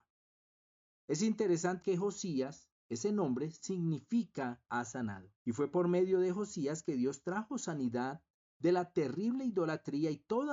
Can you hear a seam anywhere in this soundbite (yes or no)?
yes